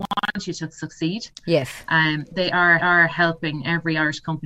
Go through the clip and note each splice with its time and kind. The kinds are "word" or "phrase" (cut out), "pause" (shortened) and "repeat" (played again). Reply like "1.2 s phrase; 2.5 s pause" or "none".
2.3 s word; 2.8 s repeat